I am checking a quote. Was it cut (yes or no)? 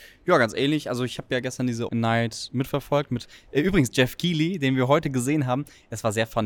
yes